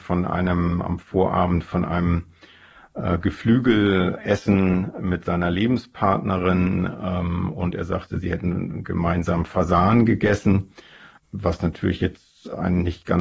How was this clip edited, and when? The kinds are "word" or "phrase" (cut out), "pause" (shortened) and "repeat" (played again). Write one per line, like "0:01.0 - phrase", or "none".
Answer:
none